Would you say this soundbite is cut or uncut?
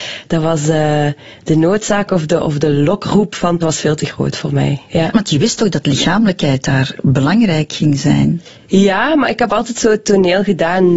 cut